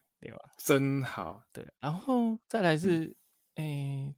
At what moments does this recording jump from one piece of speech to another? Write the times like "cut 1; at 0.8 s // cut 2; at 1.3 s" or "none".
cut 1; at 2.4 s